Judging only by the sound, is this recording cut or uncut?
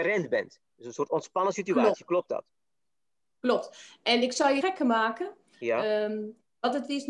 cut